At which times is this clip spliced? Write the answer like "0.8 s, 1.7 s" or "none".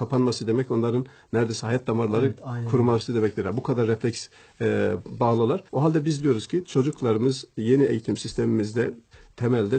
5.7 s